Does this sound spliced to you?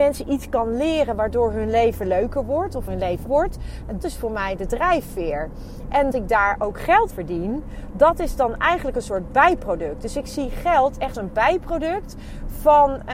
yes; 6 cuts; at 2.9 s, 3.3 s, 4.0 s, 6.1 s, 7.1 s, 11.1 s

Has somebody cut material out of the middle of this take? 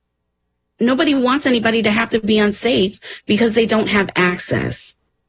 no; 0 cuts

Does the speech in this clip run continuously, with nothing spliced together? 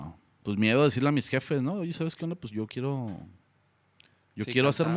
yes; 0 cuts

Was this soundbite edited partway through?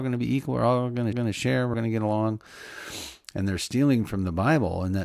yes; 2 cuts; at 1.1 s, 1.7 s

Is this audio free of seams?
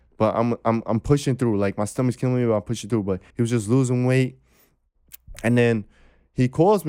no; 1 cut; at 3.3 s

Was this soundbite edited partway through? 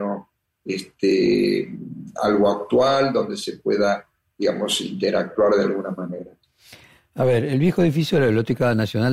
no; 0 cuts

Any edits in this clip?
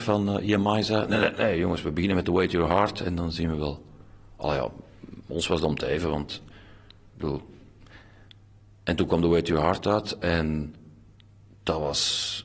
no; 0 cuts

